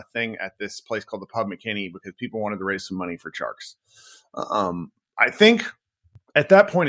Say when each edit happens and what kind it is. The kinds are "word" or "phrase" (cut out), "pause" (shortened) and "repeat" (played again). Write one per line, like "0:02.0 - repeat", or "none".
none

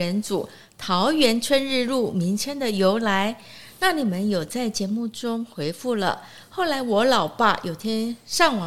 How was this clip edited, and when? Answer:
none

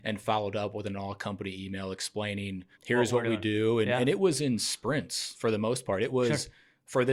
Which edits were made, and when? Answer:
0:02.7 - pause

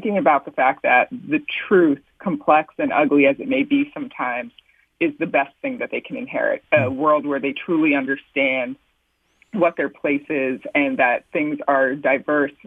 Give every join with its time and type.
none

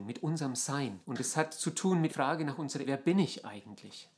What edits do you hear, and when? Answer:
0:01.0 - pause
0:02.1 - word
0:02.8 - word

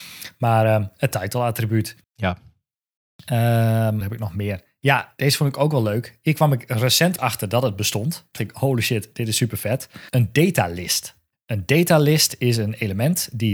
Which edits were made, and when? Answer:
0:02.0 - pause
0:04.0 - phrase
0:07.2 - word
0:08.4 - word
0:10.1 - pause
0:11.3 - pause

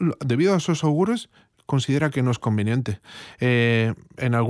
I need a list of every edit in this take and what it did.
none

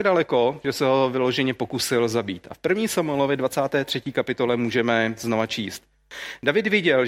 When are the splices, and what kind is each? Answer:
none

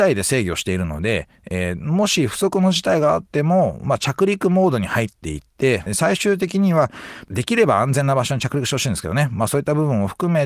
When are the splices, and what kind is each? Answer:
0:05.9 - word

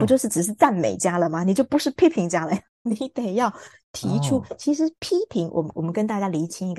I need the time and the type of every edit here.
none

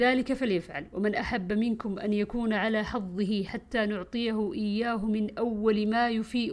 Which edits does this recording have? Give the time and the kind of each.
none

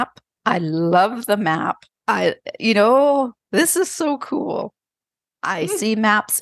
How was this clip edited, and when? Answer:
0:02.0 - pause

